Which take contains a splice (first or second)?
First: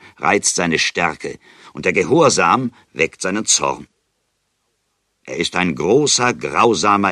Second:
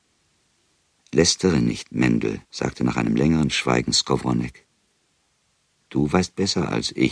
second